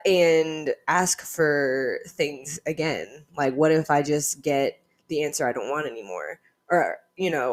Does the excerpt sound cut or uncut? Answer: uncut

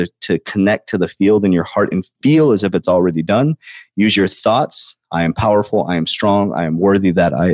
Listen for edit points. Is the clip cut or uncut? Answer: uncut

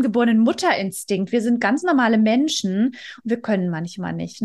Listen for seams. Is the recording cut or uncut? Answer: uncut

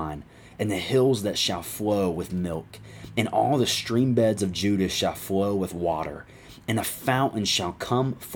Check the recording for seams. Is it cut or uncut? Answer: uncut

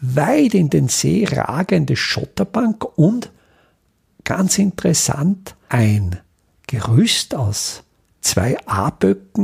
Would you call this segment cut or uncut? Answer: uncut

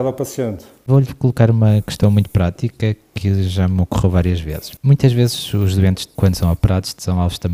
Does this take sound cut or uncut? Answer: uncut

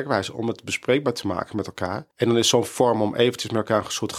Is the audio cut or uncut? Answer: cut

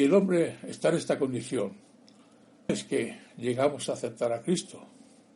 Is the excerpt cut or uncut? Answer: cut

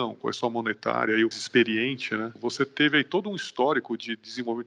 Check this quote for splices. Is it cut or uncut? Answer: cut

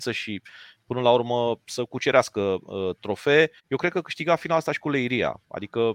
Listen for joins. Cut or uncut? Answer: cut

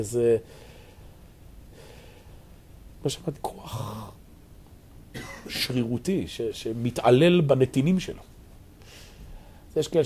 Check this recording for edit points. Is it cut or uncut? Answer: cut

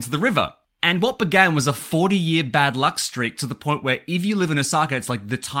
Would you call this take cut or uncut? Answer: uncut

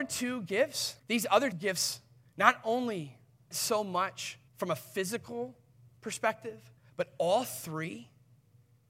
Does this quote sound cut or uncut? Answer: cut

